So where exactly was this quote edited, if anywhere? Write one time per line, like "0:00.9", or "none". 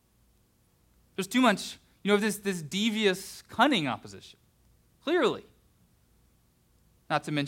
none